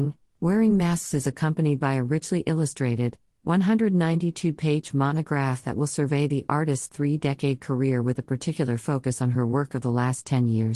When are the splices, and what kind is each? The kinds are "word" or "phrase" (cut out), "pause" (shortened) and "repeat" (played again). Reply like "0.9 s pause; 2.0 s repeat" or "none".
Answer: none